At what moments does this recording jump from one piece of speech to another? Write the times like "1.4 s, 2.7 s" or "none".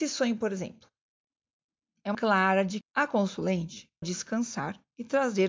2.1 s, 2.8 s, 4.0 s